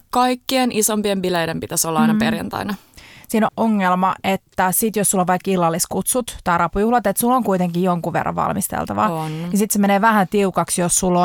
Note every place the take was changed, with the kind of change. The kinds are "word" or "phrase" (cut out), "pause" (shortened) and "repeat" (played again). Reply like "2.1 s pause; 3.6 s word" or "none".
3.5 s phrase